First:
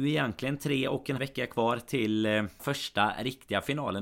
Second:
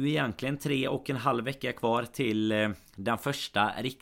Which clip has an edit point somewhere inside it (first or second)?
first